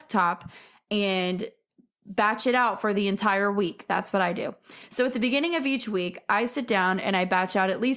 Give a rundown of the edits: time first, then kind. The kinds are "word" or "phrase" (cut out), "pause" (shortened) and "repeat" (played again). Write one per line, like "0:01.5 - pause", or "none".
none